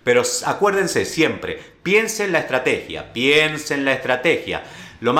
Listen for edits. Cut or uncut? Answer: uncut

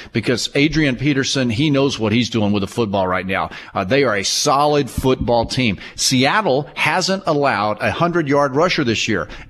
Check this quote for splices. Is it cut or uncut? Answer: uncut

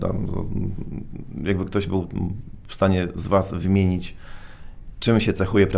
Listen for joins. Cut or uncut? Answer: uncut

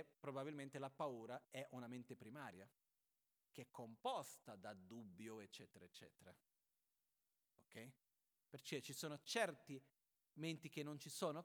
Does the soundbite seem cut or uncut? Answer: uncut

